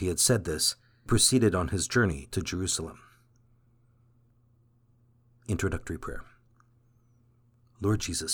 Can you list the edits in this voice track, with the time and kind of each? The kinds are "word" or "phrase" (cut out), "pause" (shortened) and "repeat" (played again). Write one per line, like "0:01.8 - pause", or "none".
0:01.1 - word
0:02.3 - word